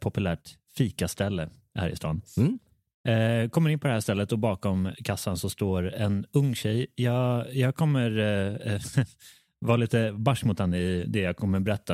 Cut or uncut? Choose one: uncut